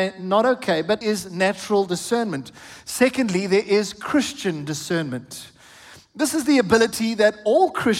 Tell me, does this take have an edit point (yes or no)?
yes